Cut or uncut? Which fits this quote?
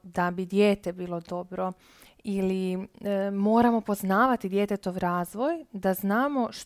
uncut